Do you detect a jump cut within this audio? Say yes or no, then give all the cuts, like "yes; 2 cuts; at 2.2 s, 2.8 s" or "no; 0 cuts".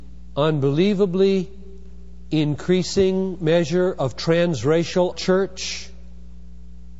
yes; 1 cut; at 5.1 s